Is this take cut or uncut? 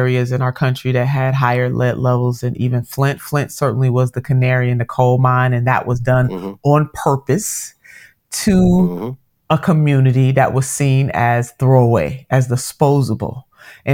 uncut